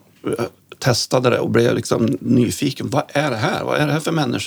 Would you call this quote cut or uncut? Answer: uncut